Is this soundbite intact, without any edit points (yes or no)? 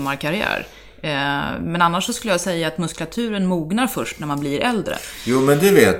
yes